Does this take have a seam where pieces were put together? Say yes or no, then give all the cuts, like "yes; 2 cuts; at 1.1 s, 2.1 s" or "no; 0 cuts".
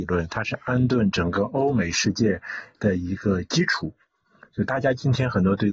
no; 0 cuts